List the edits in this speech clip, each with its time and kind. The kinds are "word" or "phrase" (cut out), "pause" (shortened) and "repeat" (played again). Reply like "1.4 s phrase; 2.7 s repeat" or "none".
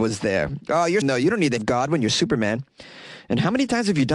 1.0 s word; 1.6 s word